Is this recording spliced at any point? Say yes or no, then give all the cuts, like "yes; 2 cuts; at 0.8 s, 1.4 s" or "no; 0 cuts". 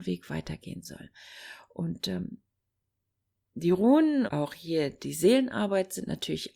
yes; 1 cut; at 4.3 s